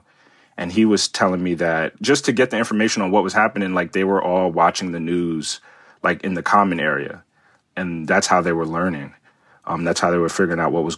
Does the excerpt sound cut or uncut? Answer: uncut